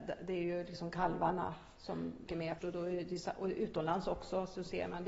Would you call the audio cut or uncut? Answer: cut